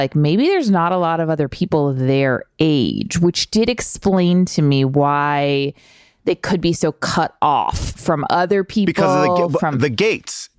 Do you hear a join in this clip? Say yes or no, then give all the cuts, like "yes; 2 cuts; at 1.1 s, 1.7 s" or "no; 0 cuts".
no; 0 cuts